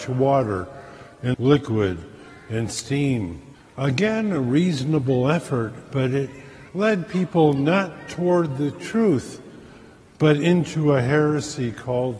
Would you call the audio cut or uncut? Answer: cut